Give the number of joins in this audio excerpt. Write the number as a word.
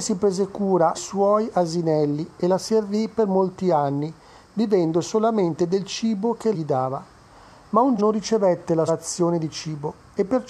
four